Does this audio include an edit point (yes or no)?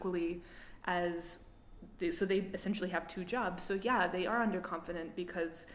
no